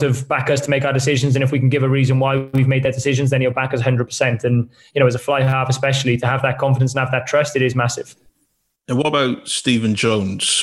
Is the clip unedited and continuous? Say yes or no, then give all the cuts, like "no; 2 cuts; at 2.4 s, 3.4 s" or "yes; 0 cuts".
yes; 0 cuts